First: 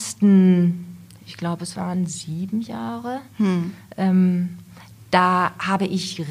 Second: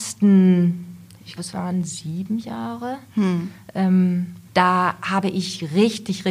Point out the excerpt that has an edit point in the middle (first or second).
second